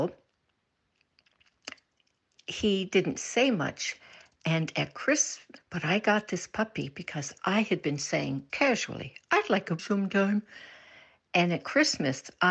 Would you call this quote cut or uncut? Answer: cut